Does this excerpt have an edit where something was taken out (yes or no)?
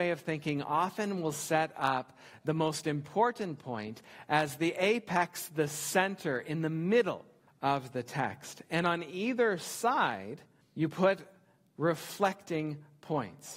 no